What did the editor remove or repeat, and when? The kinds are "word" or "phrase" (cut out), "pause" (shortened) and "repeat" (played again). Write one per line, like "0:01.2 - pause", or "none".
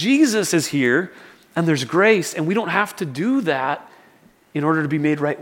none